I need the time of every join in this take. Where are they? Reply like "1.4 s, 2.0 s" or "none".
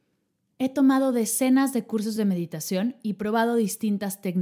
none